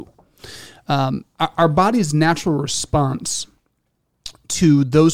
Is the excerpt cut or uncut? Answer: uncut